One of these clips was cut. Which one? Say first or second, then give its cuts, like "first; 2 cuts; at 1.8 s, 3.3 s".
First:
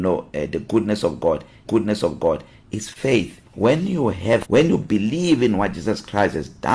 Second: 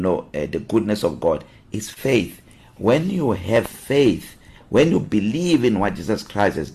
first; 3 cuts; at 1.7 s, 3.5 s, 4.4 s